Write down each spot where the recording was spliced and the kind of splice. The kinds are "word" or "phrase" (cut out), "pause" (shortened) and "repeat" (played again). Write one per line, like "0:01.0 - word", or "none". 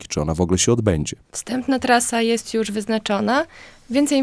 0:01.2 - pause